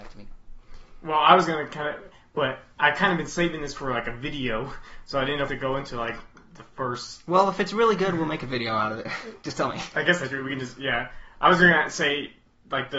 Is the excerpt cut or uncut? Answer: cut